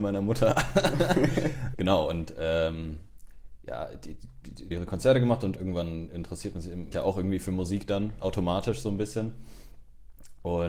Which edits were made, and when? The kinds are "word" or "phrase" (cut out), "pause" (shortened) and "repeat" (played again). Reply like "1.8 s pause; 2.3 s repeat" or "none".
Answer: 1.7 s word; 4.7 s phrase; 5.6 s word; 6.9 s phrase